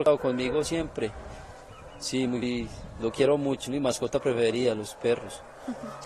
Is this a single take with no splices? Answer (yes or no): no